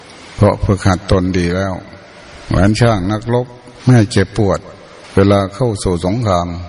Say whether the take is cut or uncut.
cut